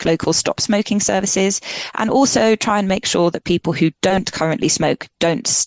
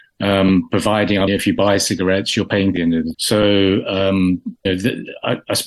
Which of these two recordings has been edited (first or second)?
second